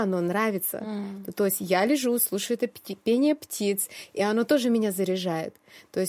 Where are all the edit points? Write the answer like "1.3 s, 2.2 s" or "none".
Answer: none